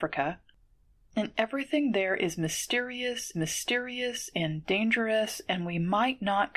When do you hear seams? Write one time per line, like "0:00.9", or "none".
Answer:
0:03.3